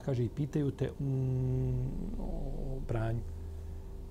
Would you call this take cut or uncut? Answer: cut